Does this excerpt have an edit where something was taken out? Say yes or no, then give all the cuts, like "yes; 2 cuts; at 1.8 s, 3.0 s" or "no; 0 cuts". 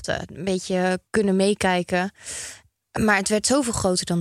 yes; 1 cut; at 1.1 s